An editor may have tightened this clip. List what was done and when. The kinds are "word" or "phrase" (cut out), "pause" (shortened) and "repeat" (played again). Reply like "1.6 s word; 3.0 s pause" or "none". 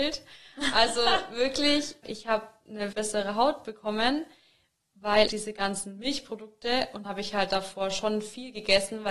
2.0 s word; 2.9 s word; 5.3 s word; 7.0 s word